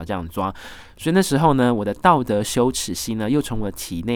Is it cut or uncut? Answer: uncut